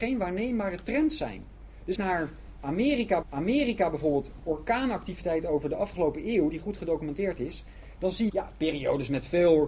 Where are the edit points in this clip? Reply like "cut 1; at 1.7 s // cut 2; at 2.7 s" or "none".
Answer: cut 1; at 2.0 s // cut 2; at 3.2 s // cut 3; at 8.3 s